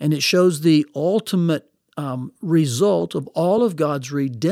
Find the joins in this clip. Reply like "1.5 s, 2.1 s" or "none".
none